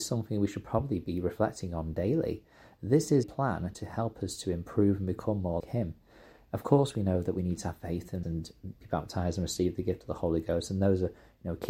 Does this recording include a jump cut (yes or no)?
yes